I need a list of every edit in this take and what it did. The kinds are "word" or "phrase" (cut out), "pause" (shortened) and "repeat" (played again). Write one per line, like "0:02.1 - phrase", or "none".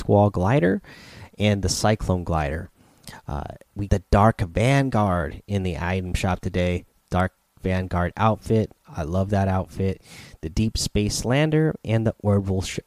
0:03.9 - word